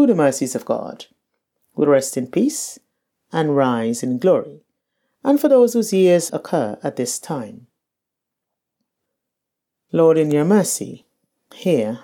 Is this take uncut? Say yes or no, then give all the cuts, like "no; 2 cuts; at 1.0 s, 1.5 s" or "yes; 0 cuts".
no; 1 cut; at 6.3 s